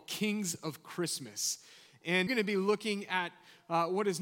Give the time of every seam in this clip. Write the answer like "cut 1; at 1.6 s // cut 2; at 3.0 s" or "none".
cut 1; at 2.3 s